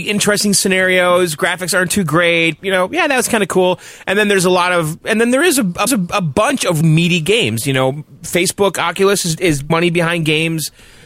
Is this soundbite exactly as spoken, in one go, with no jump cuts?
no; 4 cuts; at 2.6 s, 5.9 s, 6.8 s, 9.7 s

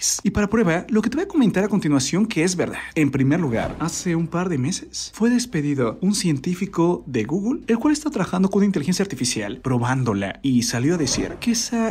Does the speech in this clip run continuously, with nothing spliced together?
yes; 0 cuts

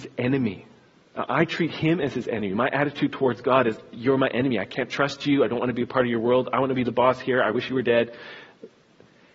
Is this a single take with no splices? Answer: yes; 0 cuts

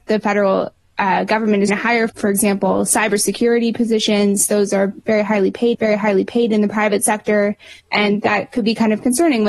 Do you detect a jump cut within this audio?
yes; 4 cuts; at 1.7 s, 2.1 s, 5.7 s, 7.8 s

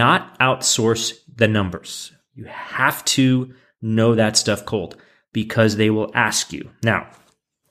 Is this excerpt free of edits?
yes; 0 cuts

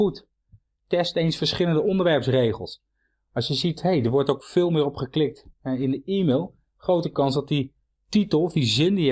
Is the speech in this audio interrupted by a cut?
no; 0 cuts

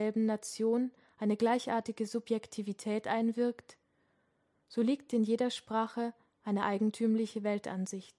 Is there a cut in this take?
no; 0 cuts

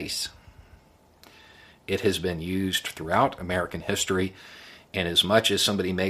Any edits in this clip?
no; 0 cuts

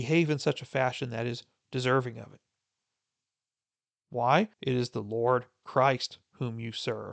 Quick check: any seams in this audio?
yes; 1 cut; at 4.5 s

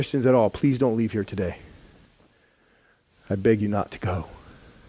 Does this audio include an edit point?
no; 0 cuts

